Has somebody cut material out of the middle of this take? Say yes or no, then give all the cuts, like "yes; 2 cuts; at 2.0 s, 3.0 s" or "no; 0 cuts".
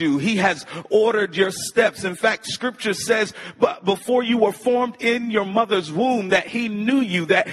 no; 0 cuts